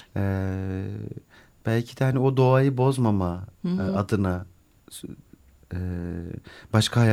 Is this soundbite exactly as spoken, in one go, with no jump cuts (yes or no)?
yes